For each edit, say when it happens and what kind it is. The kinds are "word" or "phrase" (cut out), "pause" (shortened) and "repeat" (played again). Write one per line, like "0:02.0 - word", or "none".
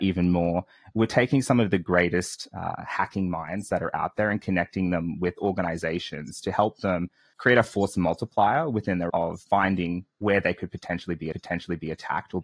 0:09.1 - word
0:11.3 - repeat